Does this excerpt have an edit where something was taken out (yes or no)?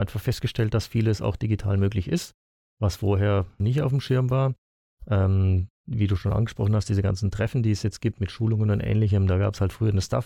yes